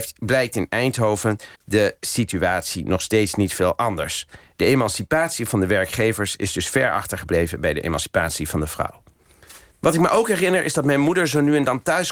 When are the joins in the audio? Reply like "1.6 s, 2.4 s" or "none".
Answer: 1.5 s, 9.7 s